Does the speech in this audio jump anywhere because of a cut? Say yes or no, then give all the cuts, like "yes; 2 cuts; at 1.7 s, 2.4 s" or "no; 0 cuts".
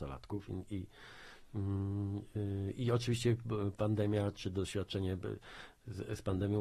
no; 0 cuts